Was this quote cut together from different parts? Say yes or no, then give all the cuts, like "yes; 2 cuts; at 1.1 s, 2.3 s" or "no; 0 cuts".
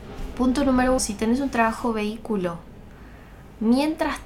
yes; 1 cut; at 1.0 s